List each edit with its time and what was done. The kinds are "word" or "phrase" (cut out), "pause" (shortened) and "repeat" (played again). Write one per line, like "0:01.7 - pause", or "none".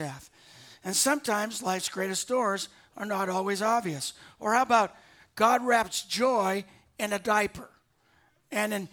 none